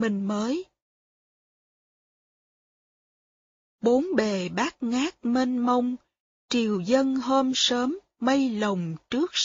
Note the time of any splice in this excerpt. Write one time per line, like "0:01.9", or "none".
none